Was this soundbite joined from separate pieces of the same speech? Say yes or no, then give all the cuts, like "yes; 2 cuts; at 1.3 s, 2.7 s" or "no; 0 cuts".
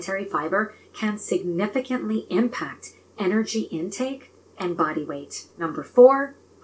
no; 0 cuts